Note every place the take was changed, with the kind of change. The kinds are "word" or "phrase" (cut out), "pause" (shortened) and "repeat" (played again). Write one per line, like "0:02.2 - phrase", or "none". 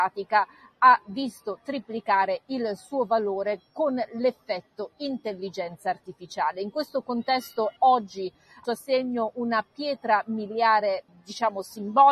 0:07.8 - word
0:08.6 - word